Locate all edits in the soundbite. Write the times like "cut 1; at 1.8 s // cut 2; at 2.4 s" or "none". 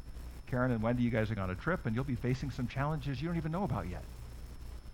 cut 1; at 1.4 s